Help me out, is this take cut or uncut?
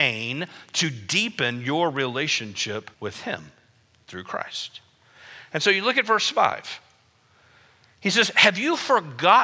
cut